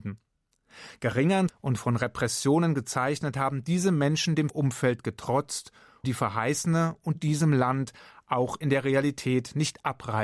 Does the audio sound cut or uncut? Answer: cut